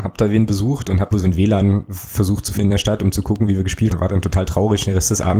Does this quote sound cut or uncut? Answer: cut